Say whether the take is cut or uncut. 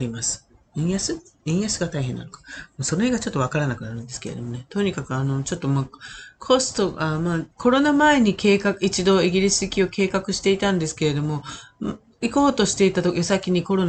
cut